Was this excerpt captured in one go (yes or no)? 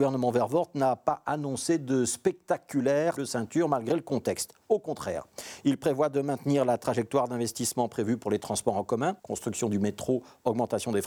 no